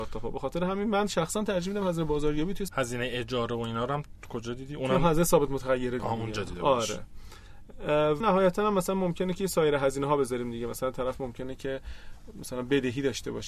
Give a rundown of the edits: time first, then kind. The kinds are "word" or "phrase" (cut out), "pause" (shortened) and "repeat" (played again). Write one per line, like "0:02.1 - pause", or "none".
0:02.7 - phrase
0:06.0 - phrase
0:08.2 - word